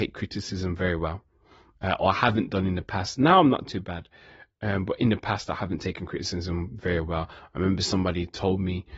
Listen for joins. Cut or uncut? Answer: uncut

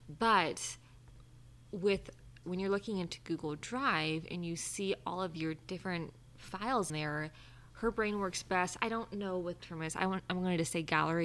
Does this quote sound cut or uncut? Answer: cut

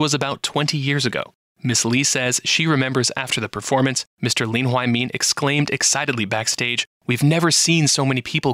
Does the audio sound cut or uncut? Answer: uncut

